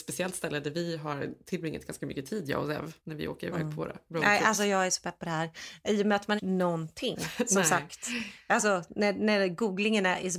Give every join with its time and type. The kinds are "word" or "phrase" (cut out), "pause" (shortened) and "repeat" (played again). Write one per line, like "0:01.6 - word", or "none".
0:03.0 - pause
0:06.4 - phrase